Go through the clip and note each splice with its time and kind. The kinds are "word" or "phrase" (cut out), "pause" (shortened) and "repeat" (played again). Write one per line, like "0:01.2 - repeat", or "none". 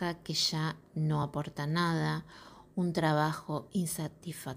none